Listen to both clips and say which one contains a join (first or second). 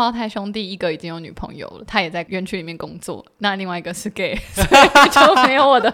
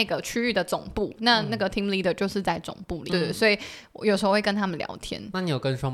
second